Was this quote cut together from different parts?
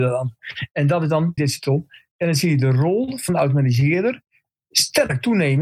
yes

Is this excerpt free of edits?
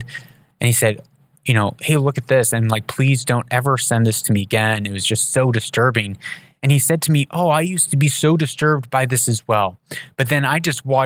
yes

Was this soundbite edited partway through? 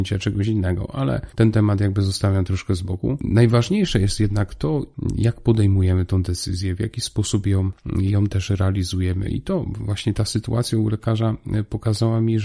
no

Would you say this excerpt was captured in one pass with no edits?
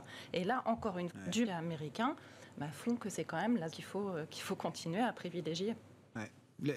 no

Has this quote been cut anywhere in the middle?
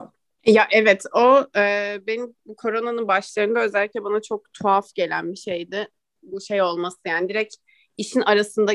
no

